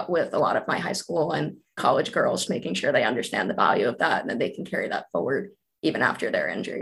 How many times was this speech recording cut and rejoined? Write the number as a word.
two